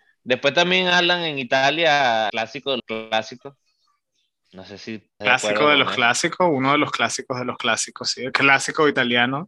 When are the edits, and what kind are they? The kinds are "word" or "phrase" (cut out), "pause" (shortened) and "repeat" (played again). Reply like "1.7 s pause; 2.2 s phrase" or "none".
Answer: 2.3 s word; 2.8 s word; 5.2 s word